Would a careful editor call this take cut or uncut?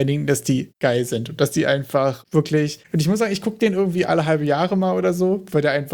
uncut